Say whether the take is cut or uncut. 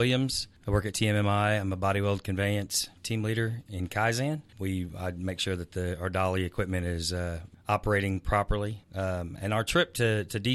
cut